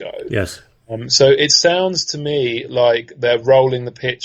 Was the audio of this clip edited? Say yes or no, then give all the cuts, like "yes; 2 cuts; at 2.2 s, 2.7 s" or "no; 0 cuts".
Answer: no; 0 cuts